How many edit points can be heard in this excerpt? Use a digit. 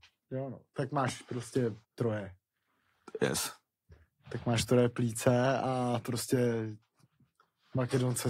1